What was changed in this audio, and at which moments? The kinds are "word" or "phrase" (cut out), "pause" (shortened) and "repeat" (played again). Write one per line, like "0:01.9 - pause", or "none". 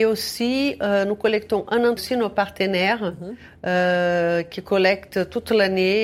0:02.0 - phrase